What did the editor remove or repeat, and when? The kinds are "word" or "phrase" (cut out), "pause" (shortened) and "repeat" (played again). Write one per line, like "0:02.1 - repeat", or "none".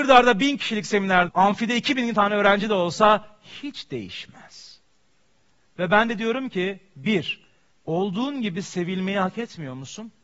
0:01.3 - word
0:07.7 - pause